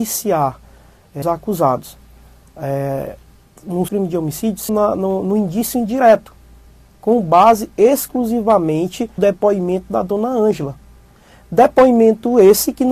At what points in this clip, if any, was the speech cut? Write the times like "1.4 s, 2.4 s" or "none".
1.2 s, 3.9 s, 4.7 s, 9.2 s